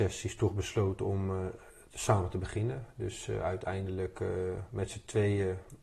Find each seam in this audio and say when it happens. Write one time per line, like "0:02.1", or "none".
none